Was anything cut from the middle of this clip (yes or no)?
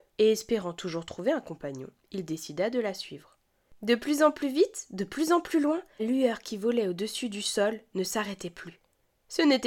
yes